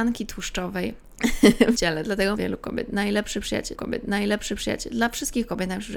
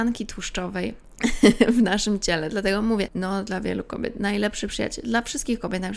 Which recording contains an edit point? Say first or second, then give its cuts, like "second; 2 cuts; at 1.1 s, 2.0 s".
first; 3 cuts; at 1.7 s, 2.3 s, 3.7 s